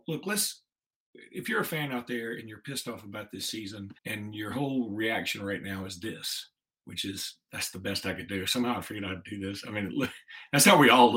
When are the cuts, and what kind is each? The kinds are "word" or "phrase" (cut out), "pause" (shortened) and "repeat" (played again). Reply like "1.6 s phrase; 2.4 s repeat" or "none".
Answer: 4.0 s pause; 6.6 s pause